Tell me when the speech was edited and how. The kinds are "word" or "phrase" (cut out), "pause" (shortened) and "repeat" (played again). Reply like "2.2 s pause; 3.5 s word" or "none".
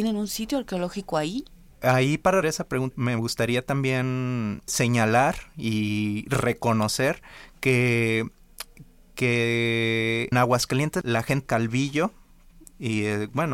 2.4 s word; 2.9 s word; 4.7 s word; 10.3 s word; 11.0 s word; 11.5 s word